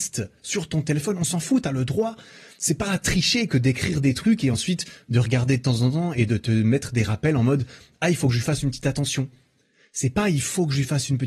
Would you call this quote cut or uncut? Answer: uncut